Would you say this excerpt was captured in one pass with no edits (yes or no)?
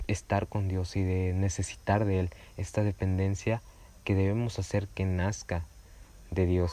yes